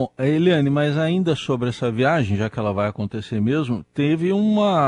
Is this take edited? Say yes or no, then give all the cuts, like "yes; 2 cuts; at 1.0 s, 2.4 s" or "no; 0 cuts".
no; 0 cuts